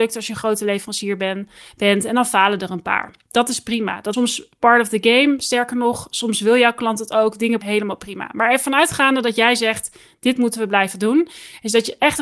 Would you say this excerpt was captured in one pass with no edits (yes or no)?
no